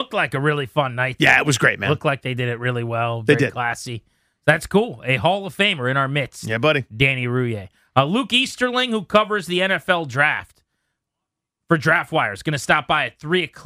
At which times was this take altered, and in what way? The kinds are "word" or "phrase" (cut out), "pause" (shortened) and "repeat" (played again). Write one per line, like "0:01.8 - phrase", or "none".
none